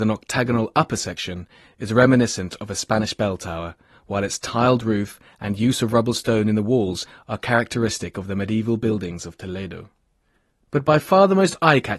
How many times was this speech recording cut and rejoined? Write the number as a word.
zero